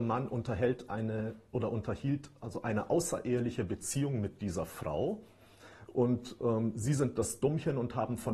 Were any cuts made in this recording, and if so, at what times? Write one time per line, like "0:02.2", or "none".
none